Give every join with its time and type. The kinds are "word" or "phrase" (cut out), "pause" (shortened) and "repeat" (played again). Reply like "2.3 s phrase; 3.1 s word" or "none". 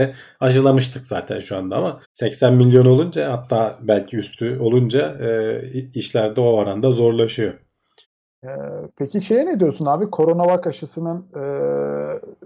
2.0 s pause; 8.9 s pause